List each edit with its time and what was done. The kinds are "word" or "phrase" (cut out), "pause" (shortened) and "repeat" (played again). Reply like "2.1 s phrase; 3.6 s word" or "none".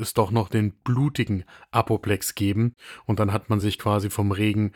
none